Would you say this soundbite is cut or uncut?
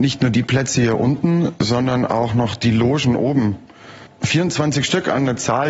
uncut